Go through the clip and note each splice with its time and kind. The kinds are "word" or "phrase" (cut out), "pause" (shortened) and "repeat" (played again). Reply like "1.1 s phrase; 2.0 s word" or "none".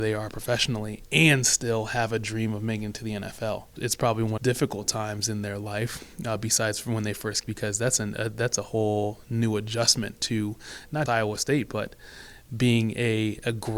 4.4 s phrase; 7.4 s phrase; 11.1 s word